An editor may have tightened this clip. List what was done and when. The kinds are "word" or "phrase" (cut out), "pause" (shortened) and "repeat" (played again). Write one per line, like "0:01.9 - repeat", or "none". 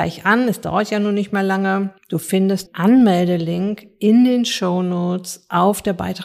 0:02.0 - pause
0:02.7 - word